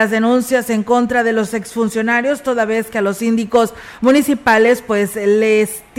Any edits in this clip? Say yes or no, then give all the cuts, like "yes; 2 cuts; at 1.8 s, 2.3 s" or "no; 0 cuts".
no; 0 cuts